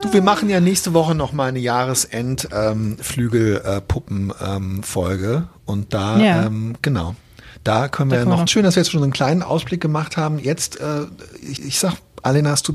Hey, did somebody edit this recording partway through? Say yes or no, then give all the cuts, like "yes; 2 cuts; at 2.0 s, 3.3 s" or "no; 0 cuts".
yes; 2 cuts; at 8.5 s, 11.6 s